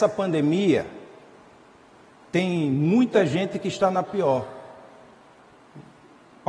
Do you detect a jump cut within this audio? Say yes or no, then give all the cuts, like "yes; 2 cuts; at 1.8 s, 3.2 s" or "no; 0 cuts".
no; 0 cuts